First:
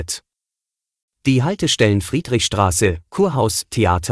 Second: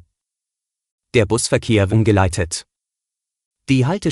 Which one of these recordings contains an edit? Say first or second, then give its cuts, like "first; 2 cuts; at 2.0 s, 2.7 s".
second; 1 cut; at 1.9 s